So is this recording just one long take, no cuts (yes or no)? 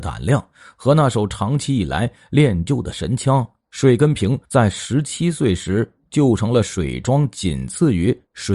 no